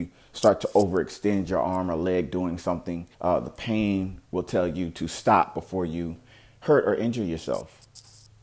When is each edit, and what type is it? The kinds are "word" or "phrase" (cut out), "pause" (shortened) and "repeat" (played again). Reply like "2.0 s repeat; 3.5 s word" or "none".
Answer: 3.1 s pause